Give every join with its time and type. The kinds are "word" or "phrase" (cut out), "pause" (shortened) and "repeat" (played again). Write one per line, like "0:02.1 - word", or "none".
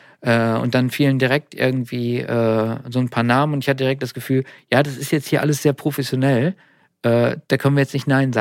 0:07.4 - pause